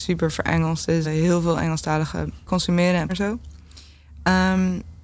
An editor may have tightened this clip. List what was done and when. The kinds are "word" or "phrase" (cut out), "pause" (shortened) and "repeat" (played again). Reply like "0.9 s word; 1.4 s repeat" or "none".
1.0 s word; 2.5 s word; 3.1 s word